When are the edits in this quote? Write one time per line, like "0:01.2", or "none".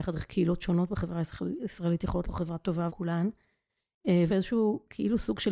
0:02.2
0:02.9
0:04.3

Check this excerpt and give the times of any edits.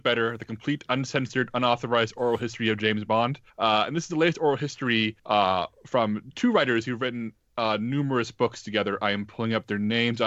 0:03.5
0:05.2

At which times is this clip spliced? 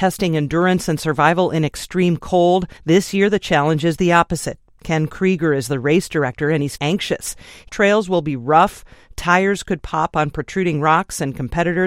0:02.8
0:06.8
0:07.7

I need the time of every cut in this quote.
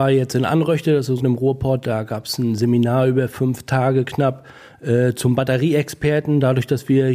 0:01.2

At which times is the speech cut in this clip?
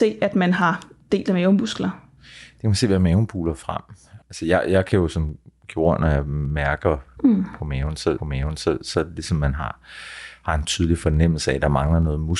0:08.2

